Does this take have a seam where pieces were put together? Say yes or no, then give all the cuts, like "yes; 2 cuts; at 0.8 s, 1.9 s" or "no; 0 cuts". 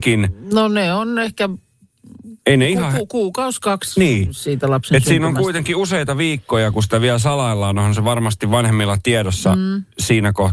yes; 1 cut; at 2.4 s